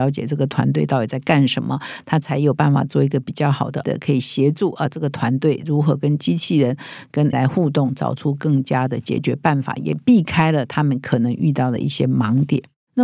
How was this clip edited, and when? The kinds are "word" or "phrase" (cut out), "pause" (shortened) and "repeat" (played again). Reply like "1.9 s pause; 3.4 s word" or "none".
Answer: 3.8 s word; 7.3 s word